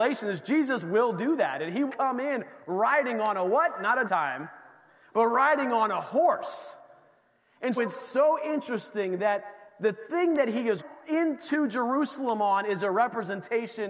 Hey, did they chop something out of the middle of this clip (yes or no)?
yes